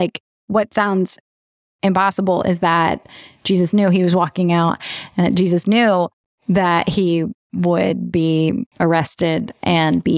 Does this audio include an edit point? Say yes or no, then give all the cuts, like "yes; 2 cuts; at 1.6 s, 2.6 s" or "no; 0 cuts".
no; 0 cuts